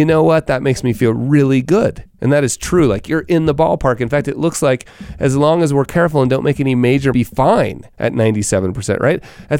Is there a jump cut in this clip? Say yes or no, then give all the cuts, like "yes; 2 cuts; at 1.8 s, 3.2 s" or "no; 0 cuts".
yes; 3 cuts; at 2.1 s, 7.1 s, 7.9 s